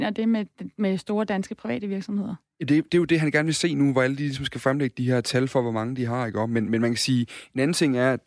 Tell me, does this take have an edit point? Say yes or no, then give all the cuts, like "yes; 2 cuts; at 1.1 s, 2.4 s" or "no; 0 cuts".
no; 0 cuts